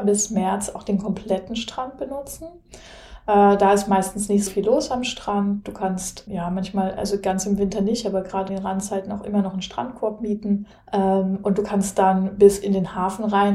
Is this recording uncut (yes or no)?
no